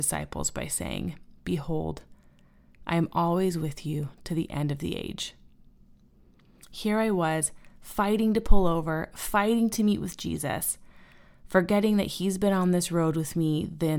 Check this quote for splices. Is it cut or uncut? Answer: uncut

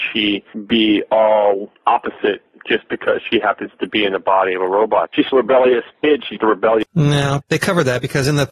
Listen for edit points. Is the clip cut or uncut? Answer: cut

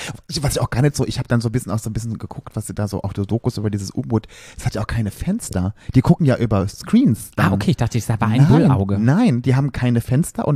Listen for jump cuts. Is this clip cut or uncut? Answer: uncut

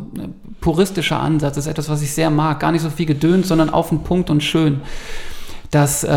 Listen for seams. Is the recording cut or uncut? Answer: uncut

